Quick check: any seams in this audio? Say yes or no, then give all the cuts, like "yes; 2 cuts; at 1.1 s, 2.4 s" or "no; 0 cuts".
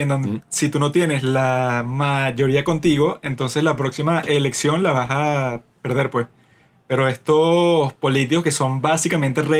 no; 0 cuts